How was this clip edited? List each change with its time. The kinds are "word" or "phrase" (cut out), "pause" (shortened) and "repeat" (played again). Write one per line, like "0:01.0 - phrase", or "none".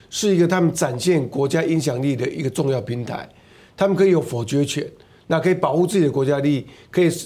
none